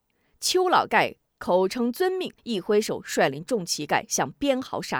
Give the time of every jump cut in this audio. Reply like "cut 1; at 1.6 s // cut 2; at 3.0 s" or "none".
cut 1; at 2.4 s